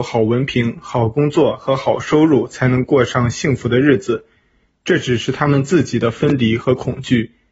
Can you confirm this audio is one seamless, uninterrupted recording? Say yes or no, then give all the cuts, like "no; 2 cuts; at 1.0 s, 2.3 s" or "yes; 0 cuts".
yes; 0 cuts